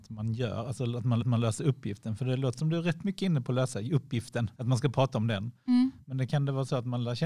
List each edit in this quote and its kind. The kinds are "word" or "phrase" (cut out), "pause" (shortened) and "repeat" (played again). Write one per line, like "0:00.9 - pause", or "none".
0:01.2 - repeat
0:04.5 - pause
0:06.3 - word